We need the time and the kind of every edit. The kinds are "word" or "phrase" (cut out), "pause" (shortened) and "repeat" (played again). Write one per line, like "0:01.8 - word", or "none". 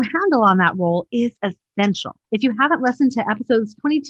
0:02.2 - pause